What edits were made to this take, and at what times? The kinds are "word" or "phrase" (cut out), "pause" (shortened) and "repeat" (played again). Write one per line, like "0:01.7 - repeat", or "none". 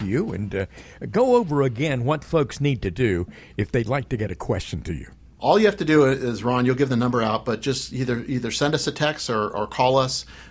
none